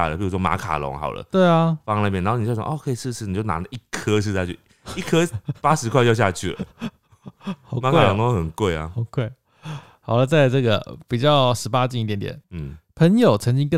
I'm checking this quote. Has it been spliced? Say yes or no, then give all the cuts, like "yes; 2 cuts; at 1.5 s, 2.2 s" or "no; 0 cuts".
yes; 1 cut; at 12.4 s